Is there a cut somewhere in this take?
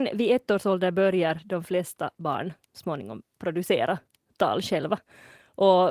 no; 0 cuts

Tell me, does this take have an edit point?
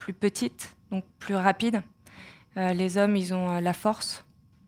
no; 0 cuts

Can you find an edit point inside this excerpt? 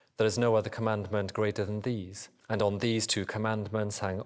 yes; 1 cut; at 2.4 s

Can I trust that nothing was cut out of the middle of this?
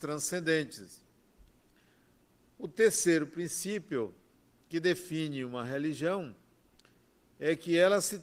yes; 0 cuts

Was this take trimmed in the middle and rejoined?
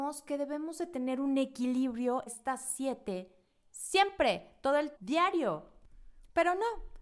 yes; 2 cuts; at 2.3 s, 5.0 s

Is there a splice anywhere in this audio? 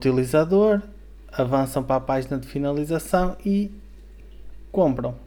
no; 0 cuts

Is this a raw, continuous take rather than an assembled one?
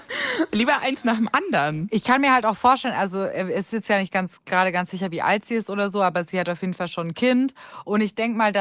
yes; 0 cuts

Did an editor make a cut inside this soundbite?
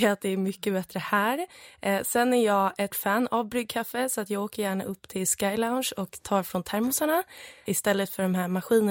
yes; 2 cuts; at 2.9 s, 7.7 s

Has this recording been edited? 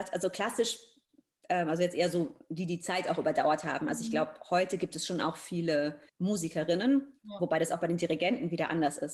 yes; 1 cut; at 6.1 s

